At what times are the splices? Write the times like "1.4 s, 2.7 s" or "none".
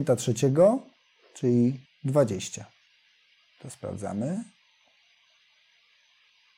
1.9 s